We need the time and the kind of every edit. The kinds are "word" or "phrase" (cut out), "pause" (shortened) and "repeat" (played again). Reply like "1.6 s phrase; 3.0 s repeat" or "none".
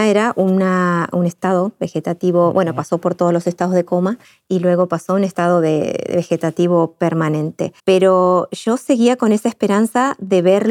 4.2 s pause; 7.8 s pause